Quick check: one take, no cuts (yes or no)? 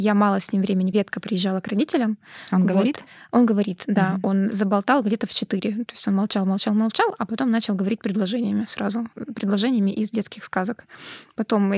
no